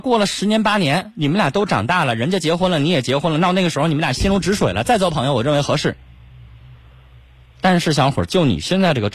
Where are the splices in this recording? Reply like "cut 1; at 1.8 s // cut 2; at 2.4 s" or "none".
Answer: none